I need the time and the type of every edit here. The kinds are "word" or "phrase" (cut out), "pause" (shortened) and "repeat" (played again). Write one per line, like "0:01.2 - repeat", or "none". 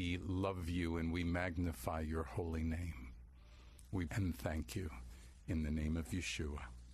0:04.1 - phrase